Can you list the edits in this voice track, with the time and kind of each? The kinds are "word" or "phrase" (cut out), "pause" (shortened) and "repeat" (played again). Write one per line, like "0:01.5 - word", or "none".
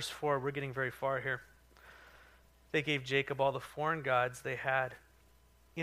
none